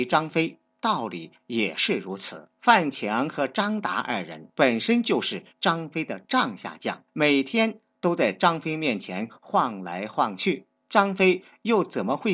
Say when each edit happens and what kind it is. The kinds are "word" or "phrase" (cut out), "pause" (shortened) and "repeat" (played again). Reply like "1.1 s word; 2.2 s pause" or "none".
2.5 s pause; 4.5 s pause; 7.1 s pause; 10.8 s pause